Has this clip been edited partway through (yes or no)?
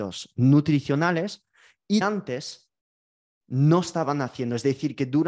yes